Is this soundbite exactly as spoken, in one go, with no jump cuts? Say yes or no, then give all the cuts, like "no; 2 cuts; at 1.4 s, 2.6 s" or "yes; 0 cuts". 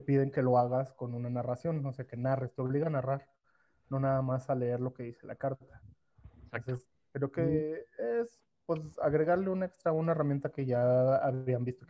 yes; 0 cuts